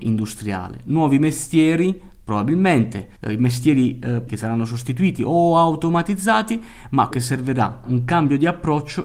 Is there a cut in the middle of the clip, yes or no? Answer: yes